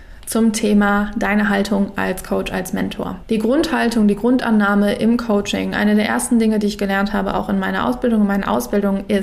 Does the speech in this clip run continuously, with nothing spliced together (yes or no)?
yes